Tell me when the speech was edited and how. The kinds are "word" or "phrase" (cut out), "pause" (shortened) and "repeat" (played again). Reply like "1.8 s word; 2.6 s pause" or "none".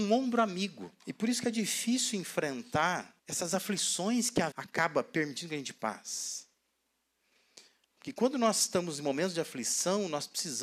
1.0 s pause; 3.2 s pause; 4.5 s word